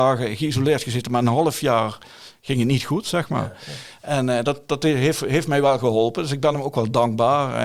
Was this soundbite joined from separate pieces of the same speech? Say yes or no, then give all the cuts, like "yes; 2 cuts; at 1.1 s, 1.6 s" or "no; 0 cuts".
no; 0 cuts